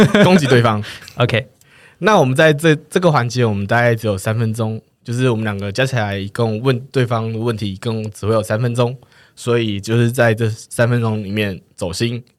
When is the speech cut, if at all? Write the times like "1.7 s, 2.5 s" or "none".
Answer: none

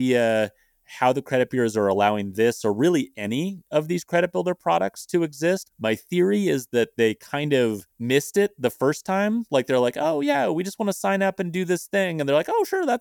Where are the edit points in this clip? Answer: 7.9 s

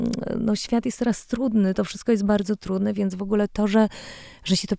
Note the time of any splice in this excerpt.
none

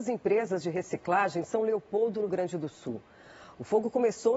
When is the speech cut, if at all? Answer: 2.3 s

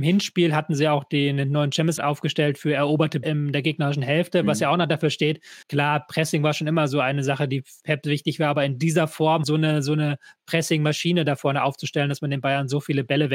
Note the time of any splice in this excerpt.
2.0 s, 3.2 s, 5.6 s, 9.4 s

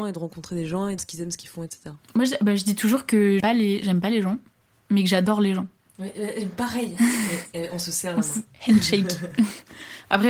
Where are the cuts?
1.0 s, 3.4 s

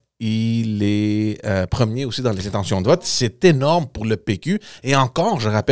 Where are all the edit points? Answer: none

